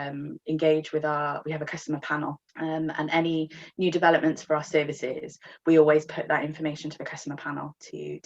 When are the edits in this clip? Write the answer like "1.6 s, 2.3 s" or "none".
2.5 s